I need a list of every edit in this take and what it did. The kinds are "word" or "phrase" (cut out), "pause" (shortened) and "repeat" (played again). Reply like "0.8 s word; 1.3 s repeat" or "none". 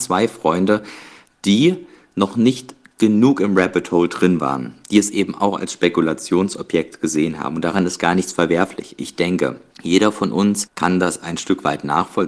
none